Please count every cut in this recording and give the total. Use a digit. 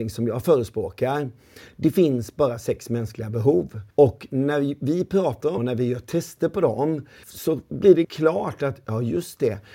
4